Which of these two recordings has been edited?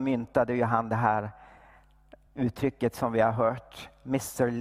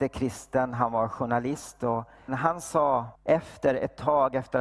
second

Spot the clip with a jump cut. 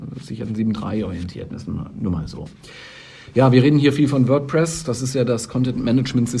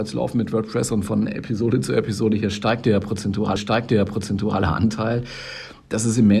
second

